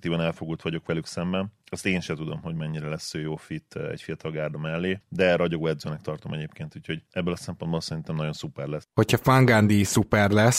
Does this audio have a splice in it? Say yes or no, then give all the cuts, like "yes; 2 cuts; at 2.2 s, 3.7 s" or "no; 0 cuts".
yes; 1 cut; at 7.1 s